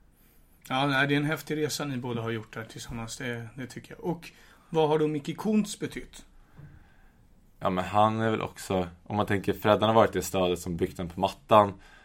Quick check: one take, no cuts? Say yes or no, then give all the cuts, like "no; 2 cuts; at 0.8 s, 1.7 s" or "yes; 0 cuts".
yes; 0 cuts